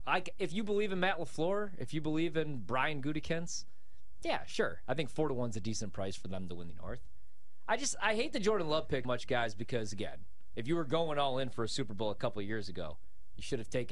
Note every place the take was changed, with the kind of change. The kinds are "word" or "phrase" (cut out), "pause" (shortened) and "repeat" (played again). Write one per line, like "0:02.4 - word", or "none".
0:06.7 - word
0:09.0 - word
0:10.5 - word